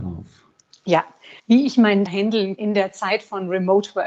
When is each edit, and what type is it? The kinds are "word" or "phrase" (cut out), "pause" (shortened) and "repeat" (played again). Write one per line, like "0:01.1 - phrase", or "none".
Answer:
0:01.4 - pause
0:02.1 - word
0:02.6 - word